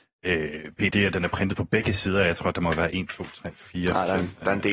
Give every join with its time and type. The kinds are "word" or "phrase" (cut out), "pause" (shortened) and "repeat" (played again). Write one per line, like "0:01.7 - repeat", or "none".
0:00.9 - word